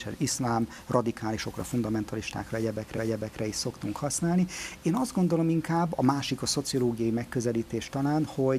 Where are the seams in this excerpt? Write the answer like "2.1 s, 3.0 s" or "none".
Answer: 2.9 s